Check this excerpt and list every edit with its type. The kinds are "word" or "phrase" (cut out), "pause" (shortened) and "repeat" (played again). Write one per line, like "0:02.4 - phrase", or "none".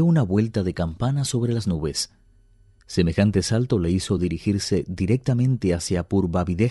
none